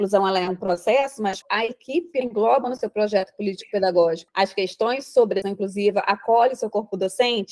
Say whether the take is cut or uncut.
cut